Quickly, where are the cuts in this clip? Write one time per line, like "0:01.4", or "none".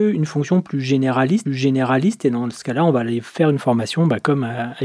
0:01.5